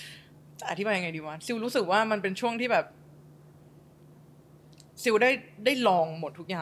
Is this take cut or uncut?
uncut